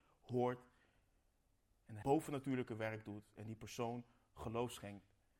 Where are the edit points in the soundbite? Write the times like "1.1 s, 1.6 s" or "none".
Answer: 2.0 s